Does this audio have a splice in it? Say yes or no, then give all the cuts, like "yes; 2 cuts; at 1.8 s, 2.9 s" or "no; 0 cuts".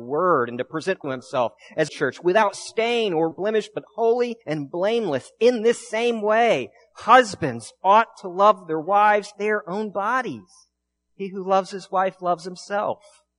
yes; 6 cuts; at 1.0 s, 1.9 s, 3.3 s, 4.4 s, 9.3 s, 11.0 s